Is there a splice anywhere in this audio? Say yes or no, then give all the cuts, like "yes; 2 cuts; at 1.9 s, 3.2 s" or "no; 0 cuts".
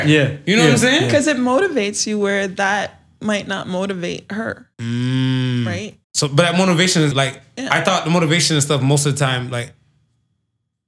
yes; 3 cuts; at 4.7 s, 6.0 s, 7.1 s